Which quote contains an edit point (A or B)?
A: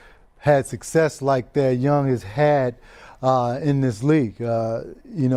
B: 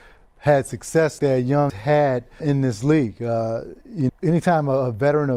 B